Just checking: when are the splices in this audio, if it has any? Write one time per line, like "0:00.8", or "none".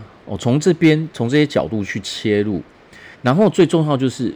0:03.1